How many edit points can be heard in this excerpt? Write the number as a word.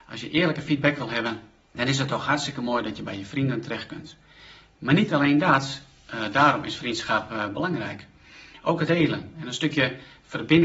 two